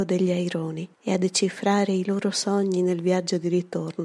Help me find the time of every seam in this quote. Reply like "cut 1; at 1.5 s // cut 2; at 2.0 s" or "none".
cut 1; at 0.9 s